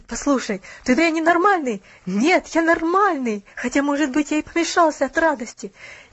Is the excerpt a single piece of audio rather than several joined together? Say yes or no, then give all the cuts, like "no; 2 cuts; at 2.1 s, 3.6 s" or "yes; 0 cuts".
no; 2 cuts; at 1.0 s, 3.5 s